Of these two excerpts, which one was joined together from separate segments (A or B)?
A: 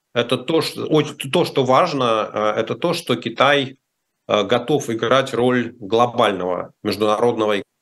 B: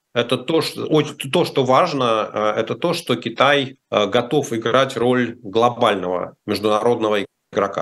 B